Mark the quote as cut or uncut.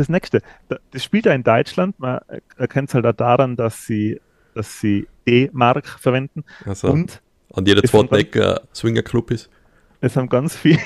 cut